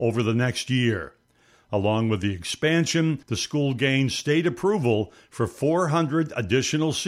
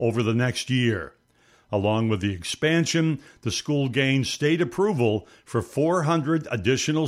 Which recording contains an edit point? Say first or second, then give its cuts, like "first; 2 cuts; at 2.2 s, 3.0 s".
first; 1 cut; at 3.2 s